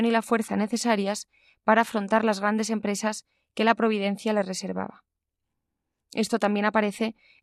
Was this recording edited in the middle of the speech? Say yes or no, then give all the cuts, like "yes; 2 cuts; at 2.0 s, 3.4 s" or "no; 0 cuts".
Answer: no; 0 cuts